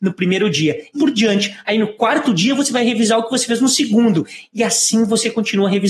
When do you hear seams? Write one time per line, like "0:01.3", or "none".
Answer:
0:00.9

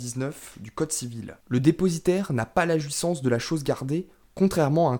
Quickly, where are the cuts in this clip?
none

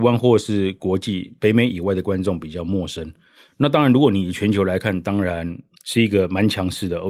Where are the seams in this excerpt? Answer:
0:05.8

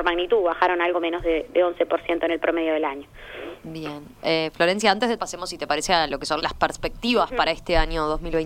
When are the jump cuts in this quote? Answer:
0:05.2
0:06.4

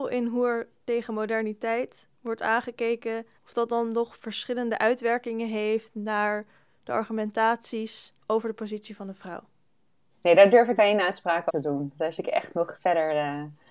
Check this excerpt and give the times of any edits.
0:03.3
0:08.2
0:10.8
0:11.5
0:12.2
0:12.7

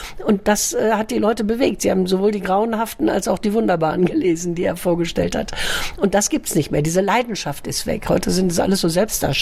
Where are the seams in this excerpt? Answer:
none

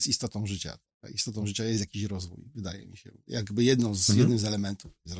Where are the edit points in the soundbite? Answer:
none

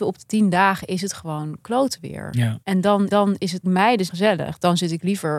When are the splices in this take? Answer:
0:02.6
0:03.1
0:03.6
0:04.1

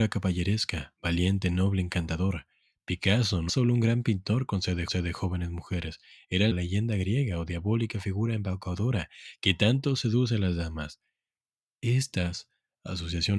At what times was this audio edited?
0:03.5
0:04.9
0:06.5

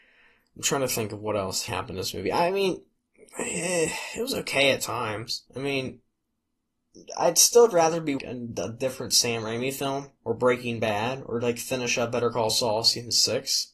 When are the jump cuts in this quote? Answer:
0:01.7
0:03.0
0:05.5
0:08.2
0:10.2

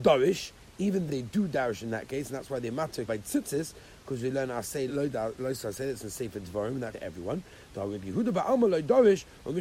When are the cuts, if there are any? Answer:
0:01.1
0:03.1
0:04.9
0:06.9

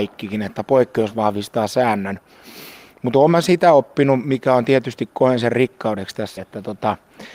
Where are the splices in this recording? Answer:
0:06.4

